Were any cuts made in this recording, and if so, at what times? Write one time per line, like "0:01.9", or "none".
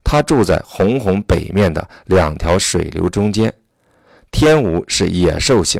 none